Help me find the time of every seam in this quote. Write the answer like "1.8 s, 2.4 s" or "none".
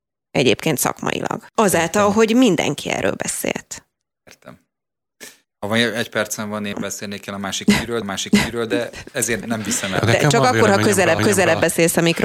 1.5 s, 5.4 s, 6.7 s, 8.0 s, 9.4 s, 11.2 s